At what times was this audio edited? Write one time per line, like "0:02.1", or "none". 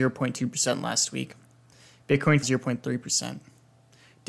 0:02.4

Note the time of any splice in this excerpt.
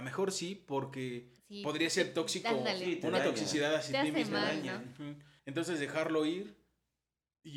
0:01.4
0:05.4

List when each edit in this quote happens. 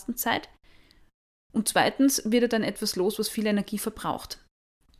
none

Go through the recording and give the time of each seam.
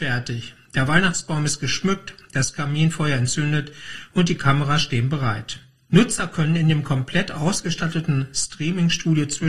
none

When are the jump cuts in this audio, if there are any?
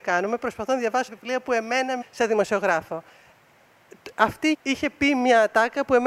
0:01.1
0:02.0
0:04.5

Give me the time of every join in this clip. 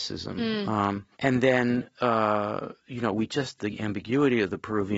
0:01.1
0:02.8

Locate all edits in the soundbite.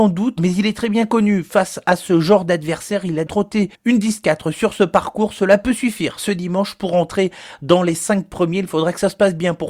0:03.3
0:03.7

